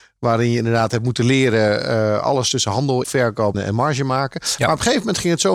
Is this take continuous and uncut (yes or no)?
no